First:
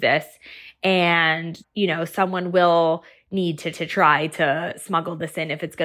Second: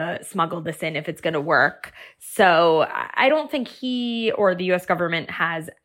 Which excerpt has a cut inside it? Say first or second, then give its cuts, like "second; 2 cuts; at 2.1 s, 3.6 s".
first; 2 cuts; at 1.6 s, 3.7 s